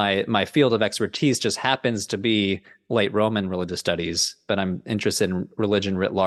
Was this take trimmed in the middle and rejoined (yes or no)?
no